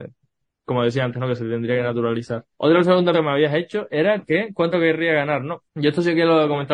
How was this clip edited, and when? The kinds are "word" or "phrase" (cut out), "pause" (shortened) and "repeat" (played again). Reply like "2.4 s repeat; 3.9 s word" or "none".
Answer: 2.5 s pause; 3.1 s word; 4.7 s word; 5.7 s pause